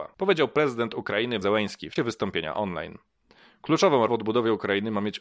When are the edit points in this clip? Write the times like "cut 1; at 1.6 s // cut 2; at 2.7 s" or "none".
cut 1; at 1.4 s // cut 2; at 2.0 s // cut 3; at 4.1 s